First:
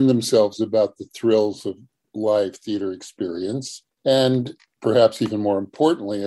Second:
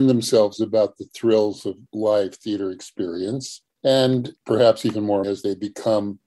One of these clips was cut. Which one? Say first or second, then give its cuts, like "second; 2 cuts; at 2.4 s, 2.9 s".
second; 3 cuts; at 1.9 s, 4.4 s, 5.2 s